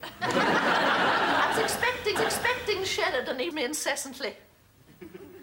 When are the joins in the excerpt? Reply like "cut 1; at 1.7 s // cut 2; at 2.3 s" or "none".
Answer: cut 1; at 2.2 s // cut 2; at 3.5 s